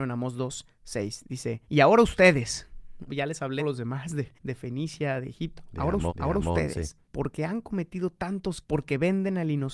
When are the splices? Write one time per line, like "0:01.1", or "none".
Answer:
0:01.6
0:03.1
0:03.6
0:04.4
0:06.1
0:07.0
0:08.6